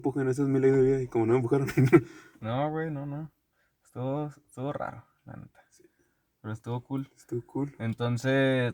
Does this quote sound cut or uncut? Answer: uncut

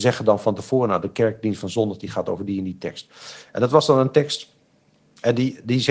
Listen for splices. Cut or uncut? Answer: uncut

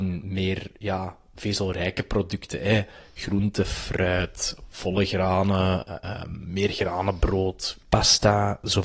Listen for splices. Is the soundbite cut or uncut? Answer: uncut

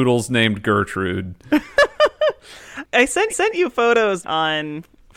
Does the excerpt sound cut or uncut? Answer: cut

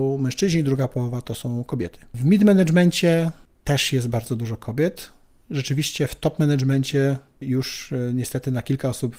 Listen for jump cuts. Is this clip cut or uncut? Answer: uncut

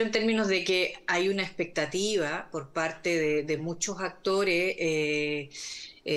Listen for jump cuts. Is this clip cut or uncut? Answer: uncut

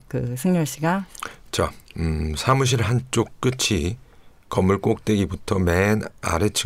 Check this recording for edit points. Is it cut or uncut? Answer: uncut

